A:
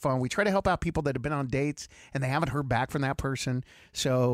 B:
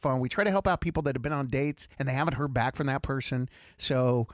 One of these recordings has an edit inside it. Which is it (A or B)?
B